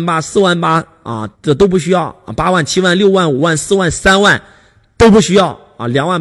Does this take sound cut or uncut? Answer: cut